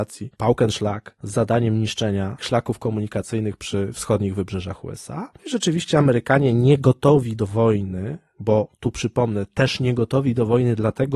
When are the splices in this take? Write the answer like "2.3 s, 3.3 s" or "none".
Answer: 2.4 s